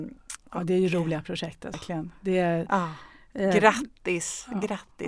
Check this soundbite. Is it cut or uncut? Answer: cut